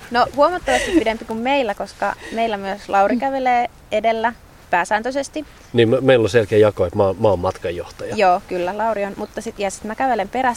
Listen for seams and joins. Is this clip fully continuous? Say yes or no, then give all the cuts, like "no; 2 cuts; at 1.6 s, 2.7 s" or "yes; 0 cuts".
yes; 0 cuts